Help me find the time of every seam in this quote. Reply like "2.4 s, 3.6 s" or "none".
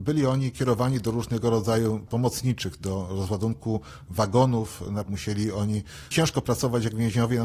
2.1 s, 5.1 s, 6.1 s